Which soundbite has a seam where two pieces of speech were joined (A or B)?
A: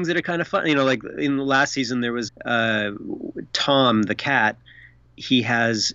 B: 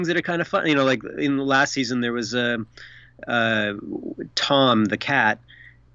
A